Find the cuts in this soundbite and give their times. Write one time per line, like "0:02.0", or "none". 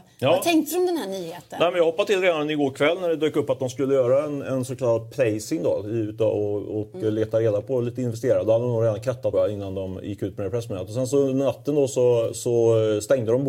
0:09.3